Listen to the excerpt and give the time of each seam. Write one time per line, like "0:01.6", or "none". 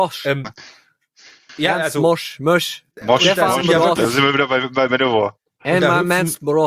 0:02.9